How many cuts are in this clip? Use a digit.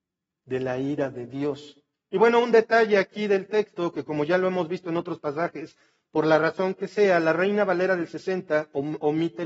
0